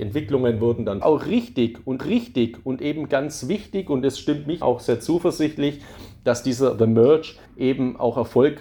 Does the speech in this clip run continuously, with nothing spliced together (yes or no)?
no